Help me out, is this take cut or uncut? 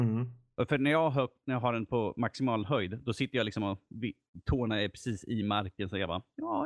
uncut